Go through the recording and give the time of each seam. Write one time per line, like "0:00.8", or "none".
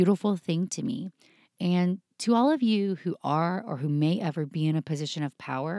none

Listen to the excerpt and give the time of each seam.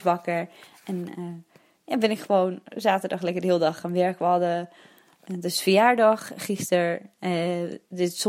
none

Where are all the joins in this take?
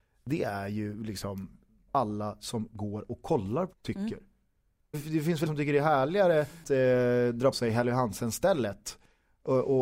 0:01.9
0:03.7
0:04.9
0:05.5
0:06.6
0:07.5

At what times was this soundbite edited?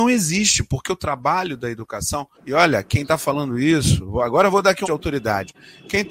0:02.3
0:04.8

